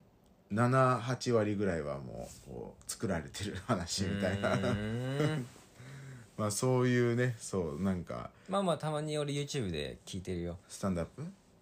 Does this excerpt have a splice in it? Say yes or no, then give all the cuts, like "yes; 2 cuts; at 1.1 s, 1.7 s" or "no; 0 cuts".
yes; 1 cut; at 10.6 s